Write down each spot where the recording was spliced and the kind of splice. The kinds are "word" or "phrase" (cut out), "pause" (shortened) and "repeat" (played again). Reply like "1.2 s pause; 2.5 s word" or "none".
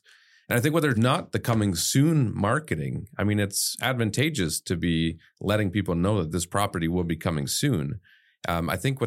0.9 s phrase